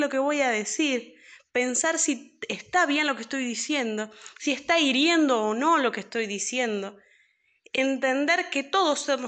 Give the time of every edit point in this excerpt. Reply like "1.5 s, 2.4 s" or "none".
none